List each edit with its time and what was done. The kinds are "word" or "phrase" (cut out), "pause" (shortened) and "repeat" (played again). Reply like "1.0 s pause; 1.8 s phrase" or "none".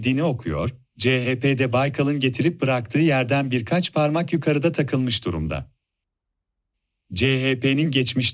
none